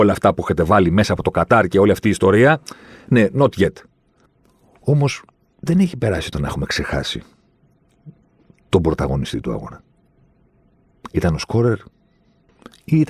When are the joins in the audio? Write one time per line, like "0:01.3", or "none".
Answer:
0:06.3